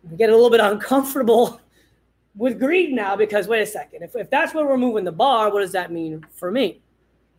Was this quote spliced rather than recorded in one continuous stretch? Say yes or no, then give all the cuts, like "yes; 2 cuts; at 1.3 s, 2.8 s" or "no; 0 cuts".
no; 0 cuts